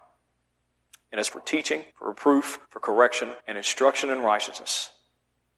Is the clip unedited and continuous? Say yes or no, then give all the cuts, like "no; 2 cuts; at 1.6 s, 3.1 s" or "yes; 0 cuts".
no; 4 cuts; at 1.3 s, 1.9 s, 2.6 s, 3.4 s